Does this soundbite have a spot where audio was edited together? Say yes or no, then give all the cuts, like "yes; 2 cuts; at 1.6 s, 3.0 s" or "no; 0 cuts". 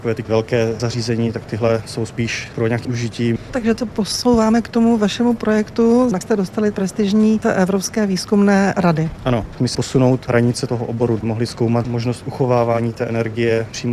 yes; 6 cuts; at 2.8 s, 3.8 s, 6.2 s, 7.4 s, 9.7 s, 11.2 s